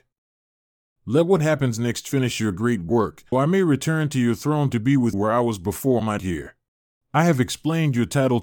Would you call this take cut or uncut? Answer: cut